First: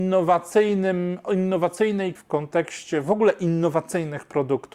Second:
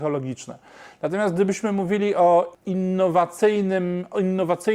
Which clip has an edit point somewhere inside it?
first; 1 cut; at 2.2 s

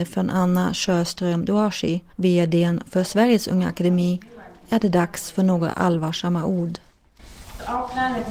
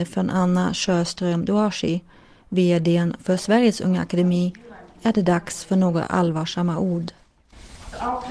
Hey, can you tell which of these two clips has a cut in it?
first; 1 cut; at 2.1 s

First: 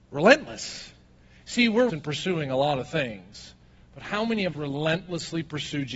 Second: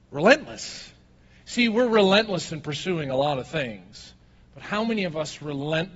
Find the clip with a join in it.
first; 2 cuts; at 1.9 s, 4.5 s

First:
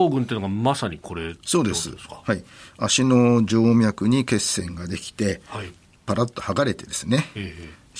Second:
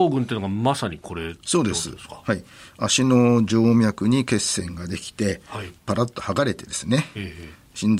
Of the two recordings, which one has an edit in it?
second; 1 cut; at 5.8 s

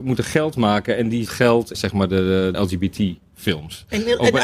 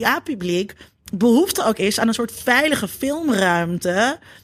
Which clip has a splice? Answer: first; 3 cuts; at 1.3 s, 1.7 s, 2.5 s

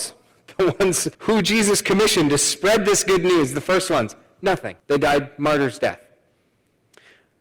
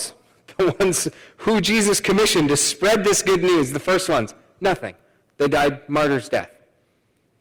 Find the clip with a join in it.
first; 2 cuts; at 1.1 s, 4.8 s

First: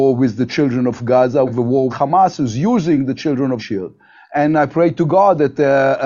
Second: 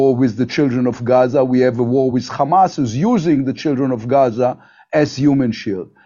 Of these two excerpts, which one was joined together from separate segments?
first; 3 cuts; at 1.5 s, 1.9 s, 3.6 s

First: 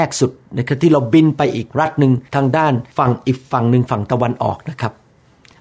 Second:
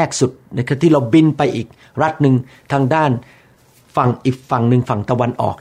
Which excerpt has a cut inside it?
first; 3 cuts; at 1.7 s, 2.3 s, 2.9 s

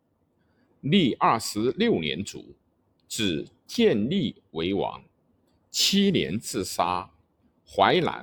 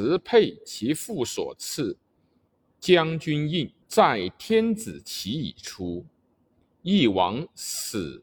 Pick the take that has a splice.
second; 1 cut; at 3.8 s

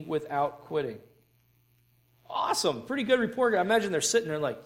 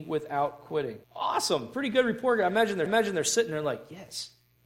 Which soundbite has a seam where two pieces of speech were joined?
second; 2 cuts; at 1.0 s, 2.9 s

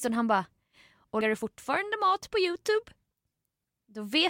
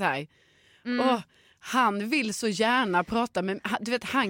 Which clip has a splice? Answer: first; 1 cut; at 1.2 s

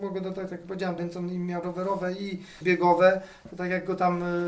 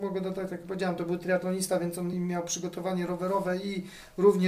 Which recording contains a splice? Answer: first; 3 cuts; at 1.0 s, 1.6 s, 2.6 s

